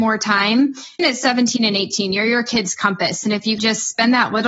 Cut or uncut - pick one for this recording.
cut